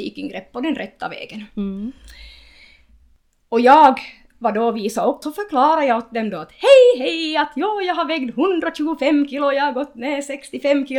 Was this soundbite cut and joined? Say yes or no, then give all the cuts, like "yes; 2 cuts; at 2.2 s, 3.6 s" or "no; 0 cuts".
yes; 1 cut; at 5.2 s